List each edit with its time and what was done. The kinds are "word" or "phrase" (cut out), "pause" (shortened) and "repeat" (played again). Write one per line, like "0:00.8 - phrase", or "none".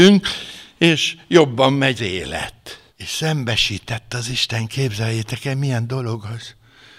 0:02.0 - word
0:02.9 - pause